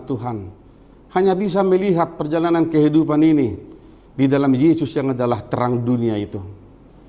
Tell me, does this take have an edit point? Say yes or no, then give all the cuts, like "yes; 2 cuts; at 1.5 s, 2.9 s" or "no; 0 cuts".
no; 0 cuts